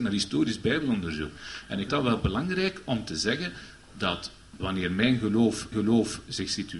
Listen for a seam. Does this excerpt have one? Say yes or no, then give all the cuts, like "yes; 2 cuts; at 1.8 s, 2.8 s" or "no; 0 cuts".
yes; 3 cuts; at 1.9 s, 4.6 s, 5.7 s